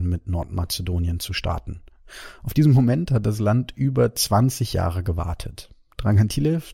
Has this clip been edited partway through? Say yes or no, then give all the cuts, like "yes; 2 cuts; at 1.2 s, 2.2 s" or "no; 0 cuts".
no; 0 cuts